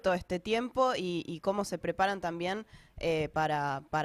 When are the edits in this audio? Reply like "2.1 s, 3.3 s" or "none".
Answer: none